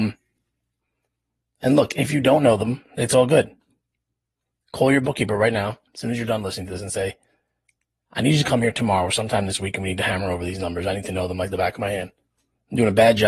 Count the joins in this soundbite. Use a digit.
1